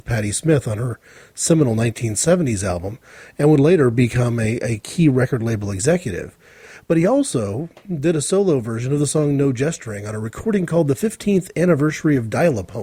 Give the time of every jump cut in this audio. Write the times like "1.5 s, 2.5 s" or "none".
none